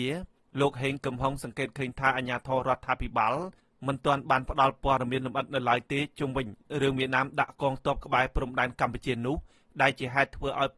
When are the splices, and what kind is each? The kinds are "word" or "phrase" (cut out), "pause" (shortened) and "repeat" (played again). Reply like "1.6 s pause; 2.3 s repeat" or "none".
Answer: none